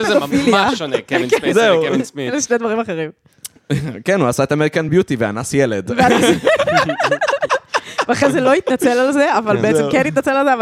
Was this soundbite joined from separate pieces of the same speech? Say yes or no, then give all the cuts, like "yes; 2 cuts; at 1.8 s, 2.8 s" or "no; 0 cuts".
no; 0 cuts